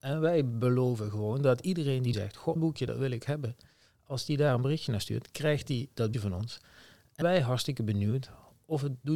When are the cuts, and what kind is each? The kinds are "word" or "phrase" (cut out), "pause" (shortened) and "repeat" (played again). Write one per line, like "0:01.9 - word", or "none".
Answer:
0:02.1 - word
0:02.6 - word
0:03.3 - word
0:06.1 - word
0:07.2 - word